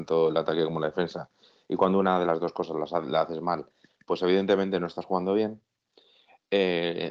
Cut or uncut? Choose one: uncut